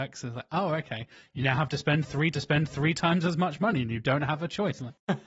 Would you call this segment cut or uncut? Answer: cut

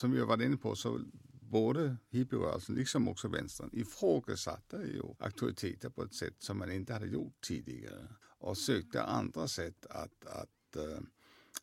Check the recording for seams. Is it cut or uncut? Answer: cut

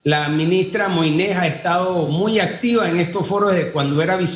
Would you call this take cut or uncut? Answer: uncut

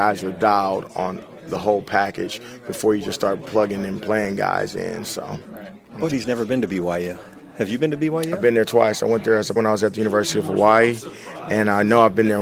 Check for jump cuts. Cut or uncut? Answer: cut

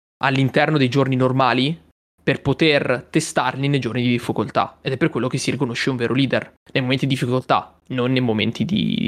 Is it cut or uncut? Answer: uncut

